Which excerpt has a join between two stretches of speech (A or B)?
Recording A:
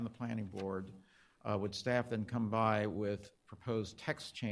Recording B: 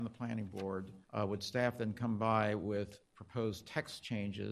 B